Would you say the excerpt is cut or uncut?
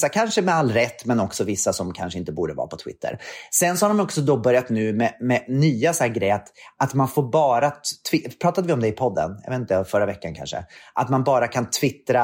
uncut